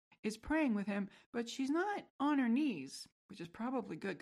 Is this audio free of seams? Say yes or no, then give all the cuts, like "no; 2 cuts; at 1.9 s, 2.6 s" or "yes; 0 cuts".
no; 2 cuts; at 2.1 s, 3.2 s